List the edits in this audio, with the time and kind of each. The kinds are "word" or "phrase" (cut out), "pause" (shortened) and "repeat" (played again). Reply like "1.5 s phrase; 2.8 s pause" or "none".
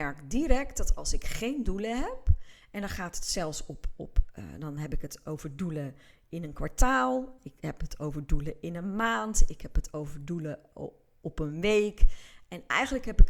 none